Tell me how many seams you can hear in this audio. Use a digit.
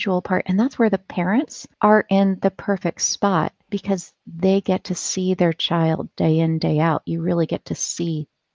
2